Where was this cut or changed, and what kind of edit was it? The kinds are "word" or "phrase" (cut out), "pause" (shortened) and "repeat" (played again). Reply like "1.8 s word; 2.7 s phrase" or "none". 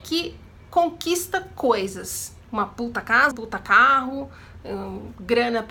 3.3 s word

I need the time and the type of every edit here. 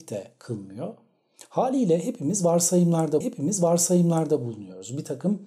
3.2 s repeat

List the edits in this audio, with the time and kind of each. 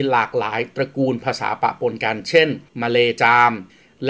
2.7 s pause

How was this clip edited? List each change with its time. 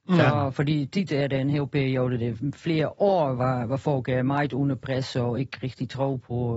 none

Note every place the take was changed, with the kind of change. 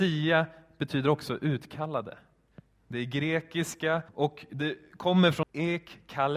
2.5 s pause; 4.1 s pause; 5.4 s word

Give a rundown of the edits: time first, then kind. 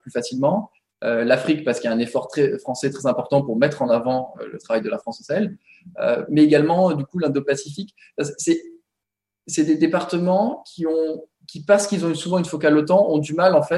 none

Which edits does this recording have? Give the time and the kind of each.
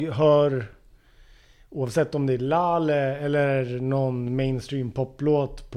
none

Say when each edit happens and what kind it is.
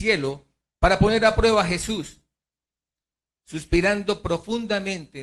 none

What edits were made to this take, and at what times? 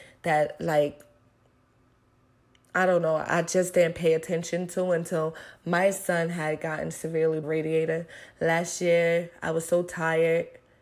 7.4 s phrase

